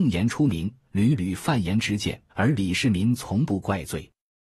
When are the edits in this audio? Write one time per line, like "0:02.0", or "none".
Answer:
0:02.3